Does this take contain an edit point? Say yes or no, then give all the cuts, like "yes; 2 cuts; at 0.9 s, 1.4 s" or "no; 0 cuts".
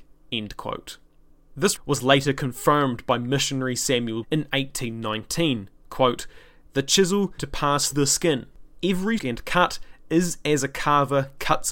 yes; 5 cuts; at 1.8 s, 4.2 s, 7.4 s, 7.9 s, 9.2 s